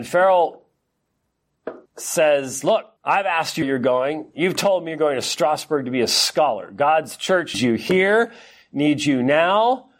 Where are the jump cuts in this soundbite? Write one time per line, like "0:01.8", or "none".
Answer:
0:01.9
0:03.0
0:03.6
0:07.5